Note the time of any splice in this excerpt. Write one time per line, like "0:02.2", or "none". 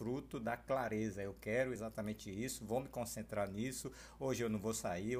none